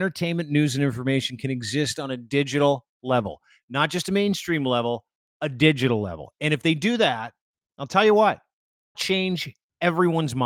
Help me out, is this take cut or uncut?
cut